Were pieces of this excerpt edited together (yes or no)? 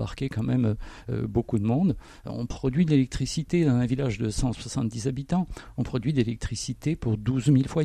no